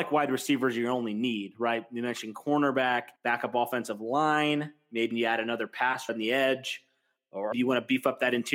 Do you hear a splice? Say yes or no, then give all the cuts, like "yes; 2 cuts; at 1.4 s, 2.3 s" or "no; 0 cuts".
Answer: yes; 4 cuts; at 3.2 s, 5.1 s, 6.1 s, 7.5 s